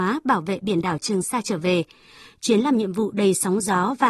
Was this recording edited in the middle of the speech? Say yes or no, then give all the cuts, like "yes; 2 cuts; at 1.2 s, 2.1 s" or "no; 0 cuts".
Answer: no; 0 cuts